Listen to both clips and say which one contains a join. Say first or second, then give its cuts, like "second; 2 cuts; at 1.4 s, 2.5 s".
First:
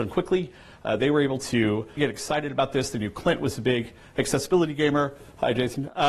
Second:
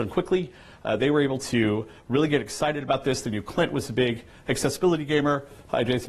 first; 1 cut; at 2.0 s